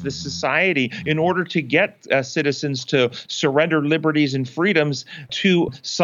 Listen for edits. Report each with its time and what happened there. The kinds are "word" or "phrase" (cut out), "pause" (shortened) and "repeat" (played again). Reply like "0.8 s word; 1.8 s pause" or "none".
none